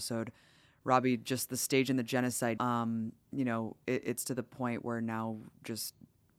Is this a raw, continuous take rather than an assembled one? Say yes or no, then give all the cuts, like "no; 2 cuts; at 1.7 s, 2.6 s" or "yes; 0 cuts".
no; 1 cut; at 2.6 s